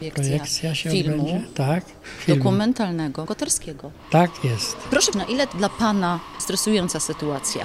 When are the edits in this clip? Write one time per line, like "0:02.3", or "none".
0:03.3
0:05.1
0:05.5
0:06.4